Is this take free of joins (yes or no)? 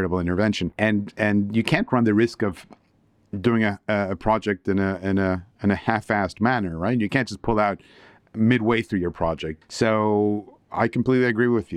yes